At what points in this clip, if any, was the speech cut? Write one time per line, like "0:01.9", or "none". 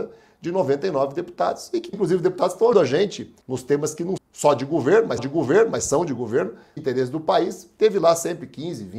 0:01.9
0:02.7
0:03.4
0:04.2
0:05.2
0:06.8